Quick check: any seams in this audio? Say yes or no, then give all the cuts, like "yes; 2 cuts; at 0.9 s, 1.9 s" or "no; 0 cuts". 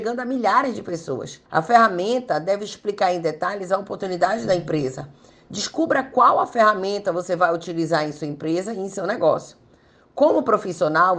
yes; 1 cut; at 1.5 s